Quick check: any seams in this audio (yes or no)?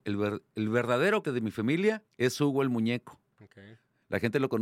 yes